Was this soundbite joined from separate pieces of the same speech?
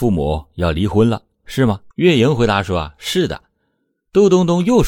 yes; 1 cut; at 1.9 s

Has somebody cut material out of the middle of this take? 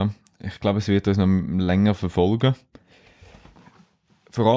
no; 0 cuts

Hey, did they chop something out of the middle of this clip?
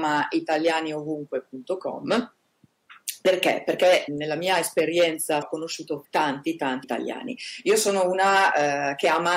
yes; 4 cuts; at 4.1 s, 5.4 s, 6.0 s, 6.8 s

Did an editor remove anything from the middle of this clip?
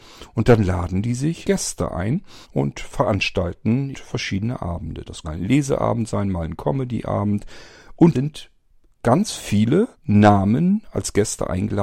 yes; 6 cuts; at 1.4 s, 2.4 s, 3.9 s, 5.2 s, 8.1 s, 9.9 s

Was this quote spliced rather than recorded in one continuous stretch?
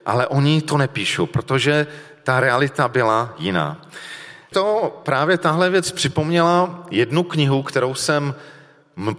yes; 1 cut; at 4.5 s

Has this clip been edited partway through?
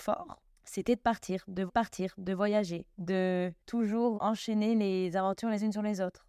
yes; 2 cuts; at 1.7 s, 4.2 s

